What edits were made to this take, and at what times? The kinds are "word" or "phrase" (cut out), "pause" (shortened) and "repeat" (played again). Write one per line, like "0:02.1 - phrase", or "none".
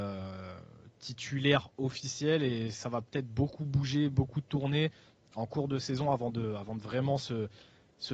none